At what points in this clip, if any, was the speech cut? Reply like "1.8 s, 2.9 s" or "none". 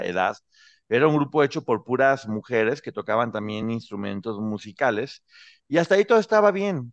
none